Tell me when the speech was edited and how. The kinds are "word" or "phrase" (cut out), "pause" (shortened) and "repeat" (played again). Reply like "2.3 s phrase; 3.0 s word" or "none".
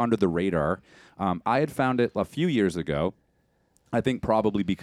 none